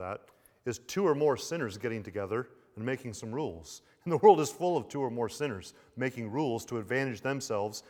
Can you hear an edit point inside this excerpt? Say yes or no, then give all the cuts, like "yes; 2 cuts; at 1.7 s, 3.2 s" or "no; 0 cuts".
no; 0 cuts